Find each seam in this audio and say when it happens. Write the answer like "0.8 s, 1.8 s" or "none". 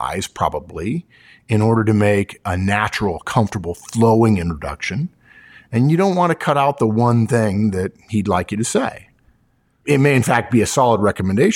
none